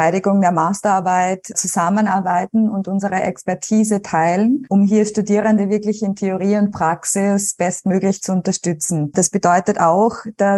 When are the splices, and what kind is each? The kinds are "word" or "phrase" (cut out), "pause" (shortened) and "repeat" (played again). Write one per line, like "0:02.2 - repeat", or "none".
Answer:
none